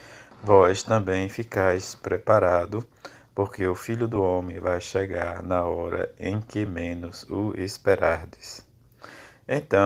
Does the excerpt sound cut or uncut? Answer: uncut